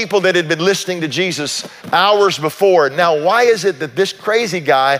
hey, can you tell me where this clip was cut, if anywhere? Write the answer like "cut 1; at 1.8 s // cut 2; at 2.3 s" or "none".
cut 1; at 1.8 s